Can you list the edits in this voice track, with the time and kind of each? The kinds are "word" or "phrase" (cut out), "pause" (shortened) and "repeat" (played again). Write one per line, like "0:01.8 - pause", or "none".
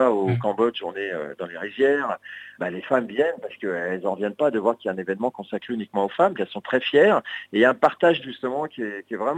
0:02.6 - word
0:06.3 - word
0:08.2 - phrase